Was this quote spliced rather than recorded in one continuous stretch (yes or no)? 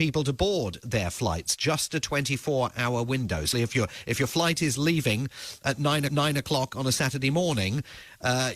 yes